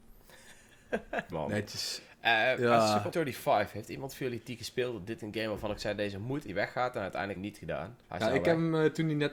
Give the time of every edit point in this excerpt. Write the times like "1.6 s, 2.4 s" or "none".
1.3 s, 3.1 s, 5.2 s, 6.5 s, 7.4 s, 8.0 s